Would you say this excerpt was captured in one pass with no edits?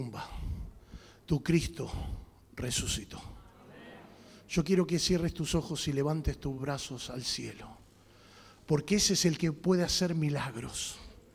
yes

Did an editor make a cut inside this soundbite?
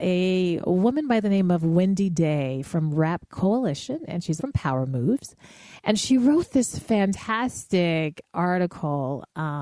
yes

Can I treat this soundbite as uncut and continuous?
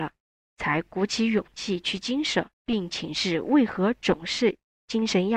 no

